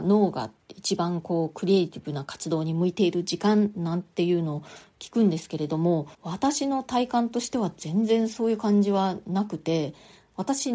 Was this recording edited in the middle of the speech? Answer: yes; 1 cut; at 6.1 s

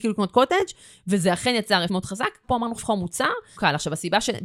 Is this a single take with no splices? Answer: no; 4 cuts; at 1.9 s, 2.4 s, 2.8 s, 3.5 s

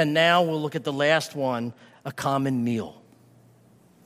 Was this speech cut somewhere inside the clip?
no; 0 cuts

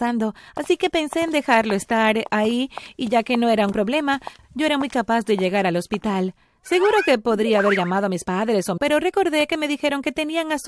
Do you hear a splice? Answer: yes; 2 cuts; at 3.7 s, 8.8 s

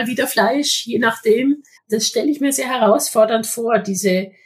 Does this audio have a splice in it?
yes; 1 cut; at 1.8 s

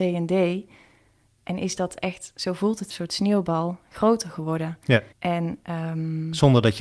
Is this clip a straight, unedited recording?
no; 2 cuts; at 2.9 s, 5.1 s

